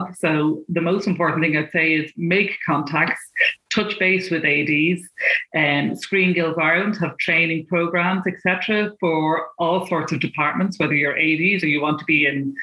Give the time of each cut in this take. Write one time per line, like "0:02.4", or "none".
none

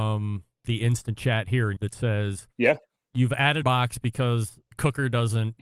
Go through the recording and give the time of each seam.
0:01.8
0:02.5
0:03.6
0:04.7

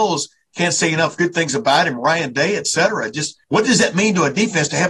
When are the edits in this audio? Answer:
0:03.4

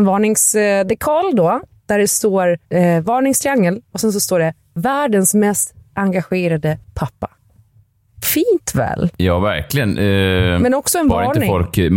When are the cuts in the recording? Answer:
0:02.7
0:06.8

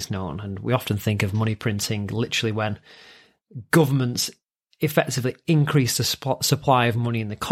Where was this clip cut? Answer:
none

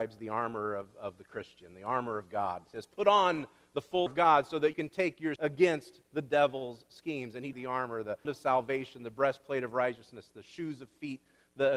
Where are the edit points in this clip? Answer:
0:04.1
0:04.7
0:05.4
0:07.5
0:08.2

